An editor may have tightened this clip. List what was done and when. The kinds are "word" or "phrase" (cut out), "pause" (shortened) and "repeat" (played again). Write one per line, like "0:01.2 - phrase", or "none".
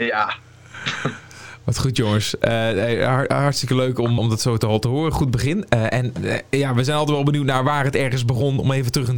0:04.2 - word